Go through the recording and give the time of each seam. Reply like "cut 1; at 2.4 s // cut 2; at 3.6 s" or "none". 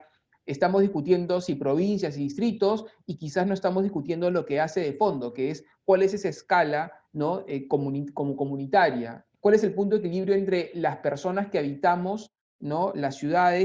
none